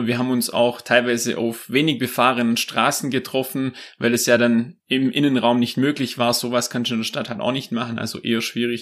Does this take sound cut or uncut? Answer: cut